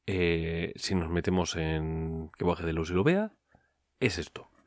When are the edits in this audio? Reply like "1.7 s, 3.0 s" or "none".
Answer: none

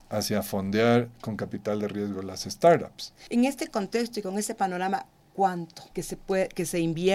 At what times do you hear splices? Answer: 5.9 s

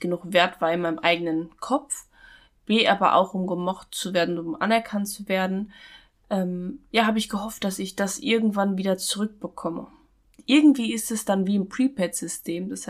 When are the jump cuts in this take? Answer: none

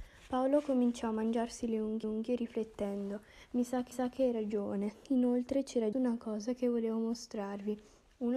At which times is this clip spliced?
2.0 s, 3.9 s, 5.9 s

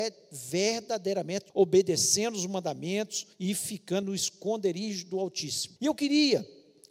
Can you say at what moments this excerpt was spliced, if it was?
1.5 s, 3.3 s, 4.0 s, 5.8 s

